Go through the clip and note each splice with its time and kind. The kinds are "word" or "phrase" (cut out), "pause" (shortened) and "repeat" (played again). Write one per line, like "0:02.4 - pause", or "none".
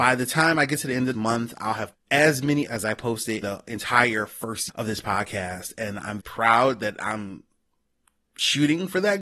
0:01.1 - word
0:01.9 - word
0:02.7 - word
0:03.4 - word
0:04.7 - word
0:06.2 - word